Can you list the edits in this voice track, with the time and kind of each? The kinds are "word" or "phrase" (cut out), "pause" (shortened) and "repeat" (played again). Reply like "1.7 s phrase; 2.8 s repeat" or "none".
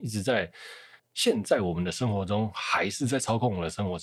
1.0 s pause